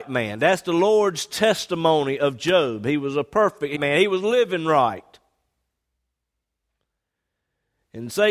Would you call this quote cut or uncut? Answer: cut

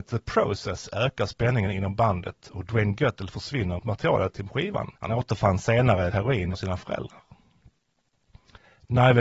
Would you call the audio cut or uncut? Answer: cut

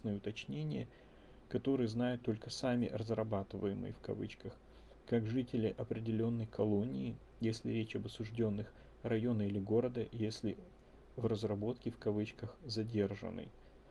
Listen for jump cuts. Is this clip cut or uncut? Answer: uncut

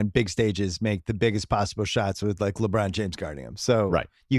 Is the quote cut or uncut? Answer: uncut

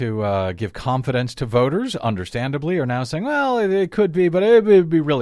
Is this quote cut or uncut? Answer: uncut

